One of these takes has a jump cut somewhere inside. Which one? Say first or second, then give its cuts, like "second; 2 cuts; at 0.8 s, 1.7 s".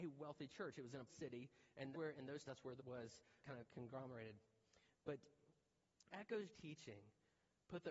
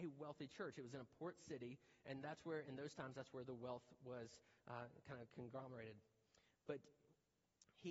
first; 7 cuts; at 1.1 s, 1.9 s, 2.4 s, 2.8 s, 3.4 s, 6.1 s, 6.5 s